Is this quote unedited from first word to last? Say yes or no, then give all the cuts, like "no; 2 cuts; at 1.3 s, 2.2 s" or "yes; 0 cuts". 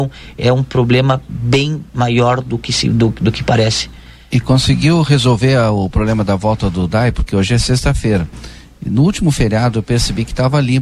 yes; 0 cuts